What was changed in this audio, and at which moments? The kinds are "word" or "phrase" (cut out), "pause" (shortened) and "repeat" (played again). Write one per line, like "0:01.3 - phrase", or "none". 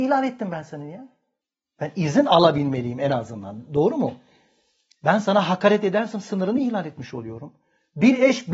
none